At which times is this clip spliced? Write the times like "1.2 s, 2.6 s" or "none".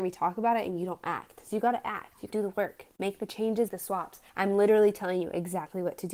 2.3 s, 3.7 s, 4.3 s

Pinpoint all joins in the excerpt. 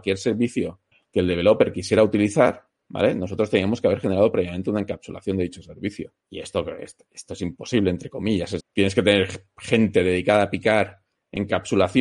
6.2 s, 8.6 s

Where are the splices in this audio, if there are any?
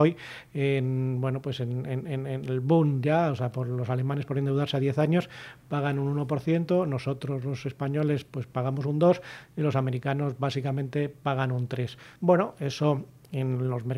12.2 s

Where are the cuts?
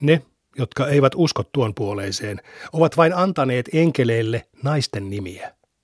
none

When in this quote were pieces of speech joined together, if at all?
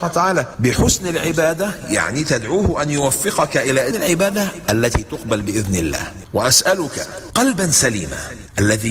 3.9 s

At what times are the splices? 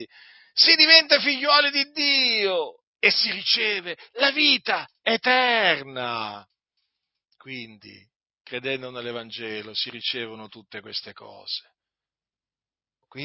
none

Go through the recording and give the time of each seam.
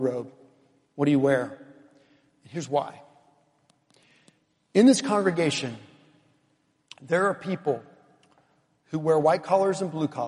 none

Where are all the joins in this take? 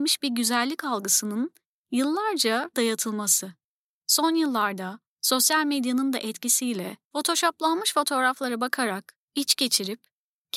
2.7 s, 7.0 s

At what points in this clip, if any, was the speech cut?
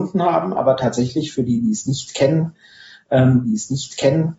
3.4 s

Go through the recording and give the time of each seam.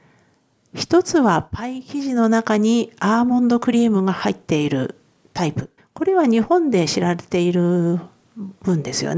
5.1 s, 5.8 s

